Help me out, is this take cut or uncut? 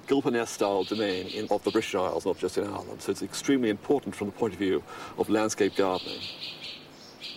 cut